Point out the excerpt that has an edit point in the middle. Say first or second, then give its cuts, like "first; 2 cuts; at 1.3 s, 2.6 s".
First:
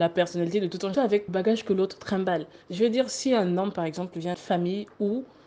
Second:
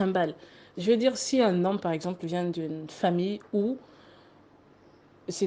first; 4 cuts; at 0.9 s, 1.3 s, 2.6 s, 4.3 s